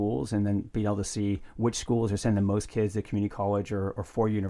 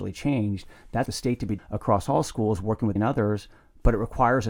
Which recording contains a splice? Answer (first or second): second